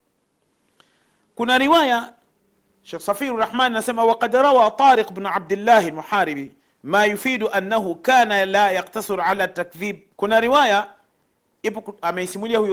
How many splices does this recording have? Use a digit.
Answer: 1